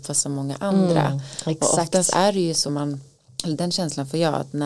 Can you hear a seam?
yes; 2 cuts; at 2.7 s, 3.2 s

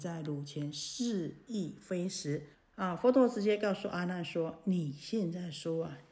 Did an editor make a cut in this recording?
yes; 1 cut; at 2.5 s

